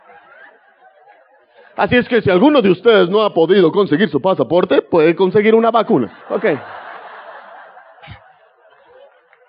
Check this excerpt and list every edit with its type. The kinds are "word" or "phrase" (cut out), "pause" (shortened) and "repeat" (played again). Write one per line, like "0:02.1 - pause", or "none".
0:06.2 - pause